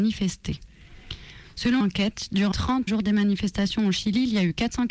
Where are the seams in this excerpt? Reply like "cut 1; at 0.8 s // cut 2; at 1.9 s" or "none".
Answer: cut 1; at 1.8 s // cut 2; at 2.5 s // cut 3; at 2.9 s